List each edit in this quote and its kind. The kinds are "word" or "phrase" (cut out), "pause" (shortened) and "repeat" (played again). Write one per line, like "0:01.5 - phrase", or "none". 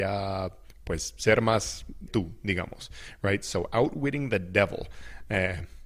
0:02.1 - phrase